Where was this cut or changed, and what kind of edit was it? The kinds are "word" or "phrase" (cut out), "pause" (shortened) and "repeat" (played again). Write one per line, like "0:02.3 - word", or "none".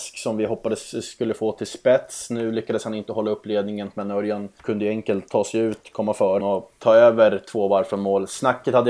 0:03.9 - word
0:04.6 - pause
0:06.4 - word